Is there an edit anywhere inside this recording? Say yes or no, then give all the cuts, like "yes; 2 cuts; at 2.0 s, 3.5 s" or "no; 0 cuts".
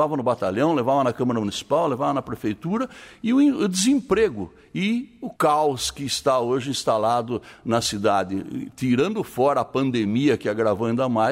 yes; 1 cut; at 5.4 s